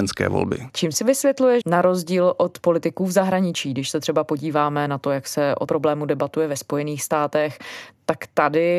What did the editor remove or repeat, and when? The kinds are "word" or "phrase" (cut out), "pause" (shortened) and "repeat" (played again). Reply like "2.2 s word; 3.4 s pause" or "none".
1.6 s word; 5.7 s word